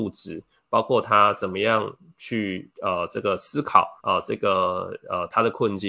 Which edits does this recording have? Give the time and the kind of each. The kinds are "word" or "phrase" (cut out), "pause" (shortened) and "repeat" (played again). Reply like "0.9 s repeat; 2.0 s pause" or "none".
2.7 s pause; 4.0 s pause